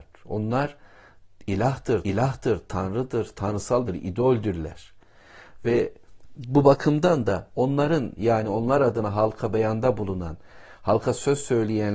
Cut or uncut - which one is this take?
cut